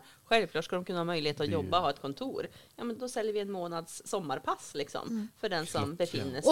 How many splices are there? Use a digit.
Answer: 1